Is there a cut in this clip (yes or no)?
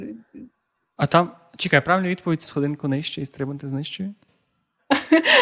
yes